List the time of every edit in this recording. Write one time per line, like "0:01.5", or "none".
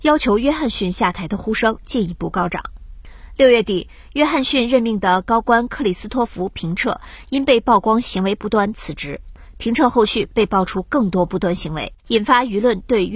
0:12.0